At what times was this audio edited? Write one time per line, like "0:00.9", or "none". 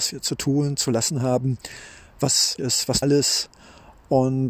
0:02.6
0:03.0